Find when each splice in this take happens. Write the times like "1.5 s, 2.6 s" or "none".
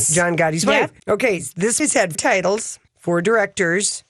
1.0 s, 1.8 s, 2.1 s, 2.9 s

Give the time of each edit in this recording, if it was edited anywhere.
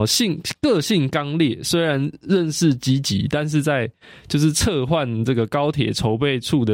none

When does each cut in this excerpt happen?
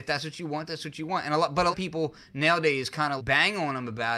1.7 s, 3.2 s

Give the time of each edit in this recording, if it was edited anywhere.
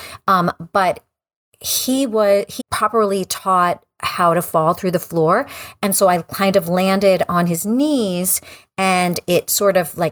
2.6 s

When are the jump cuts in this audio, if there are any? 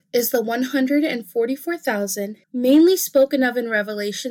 2.4 s

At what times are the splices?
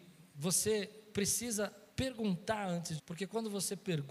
1.9 s, 3.0 s

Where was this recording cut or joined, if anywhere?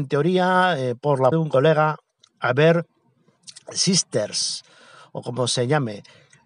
1.3 s

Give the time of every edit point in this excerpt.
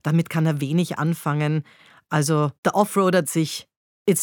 2.6 s, 3.2 s

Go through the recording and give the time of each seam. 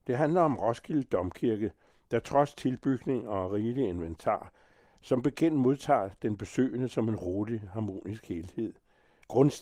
none

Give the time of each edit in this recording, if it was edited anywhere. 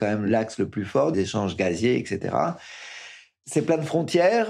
1.1 s

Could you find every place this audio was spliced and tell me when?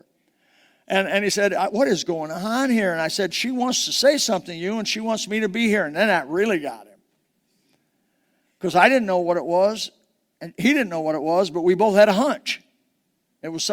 none

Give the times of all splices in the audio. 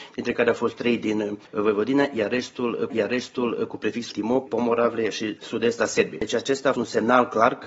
2.9 s, 4.1 s, 4.5 s, 5.4 s, 6.7 s

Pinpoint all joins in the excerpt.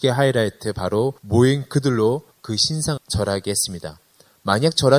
1.2 s, 2.3 s, 3.0 s

